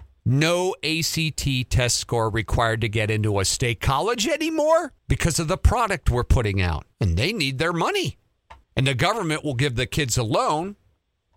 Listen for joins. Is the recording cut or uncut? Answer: cut